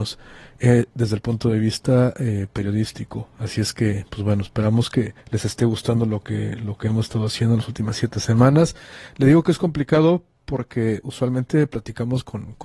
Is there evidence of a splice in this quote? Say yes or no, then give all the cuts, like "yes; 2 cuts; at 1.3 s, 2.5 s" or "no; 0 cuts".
yes; 1 cut; at 5.2 s